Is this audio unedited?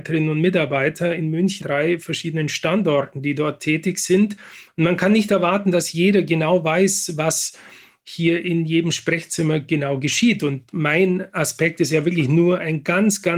no; 1 cut; at 1.6 s

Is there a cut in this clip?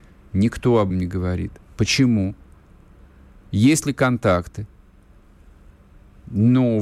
yes; 1 cut; at 0.9 s

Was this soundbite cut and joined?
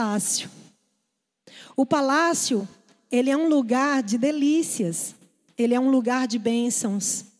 no; 0 cuts

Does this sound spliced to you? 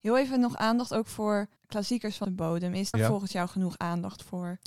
yes; 3 cuts; at 1.6 s, 2.2 s, 2.9 s

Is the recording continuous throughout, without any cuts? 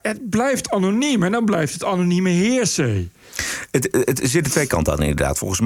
yes; 0 cuts

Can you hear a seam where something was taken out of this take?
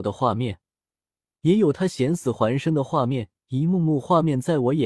yes; 1 cut; at 3.4 s

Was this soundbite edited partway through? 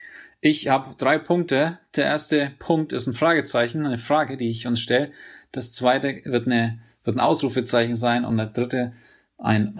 no; 0 cuts

